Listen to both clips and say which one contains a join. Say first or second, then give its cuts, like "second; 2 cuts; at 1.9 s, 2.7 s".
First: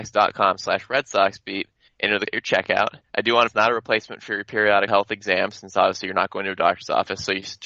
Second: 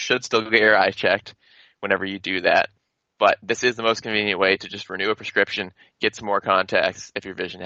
first; 5 cuts; at 1.9 s, 2.3 s, 3.0 s, 3.5 s, 4.9 s